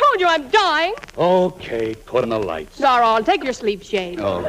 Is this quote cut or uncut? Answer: cut